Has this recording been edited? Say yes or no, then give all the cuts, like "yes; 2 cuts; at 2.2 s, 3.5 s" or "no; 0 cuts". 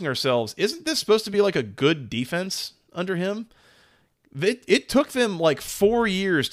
no; 0 cuts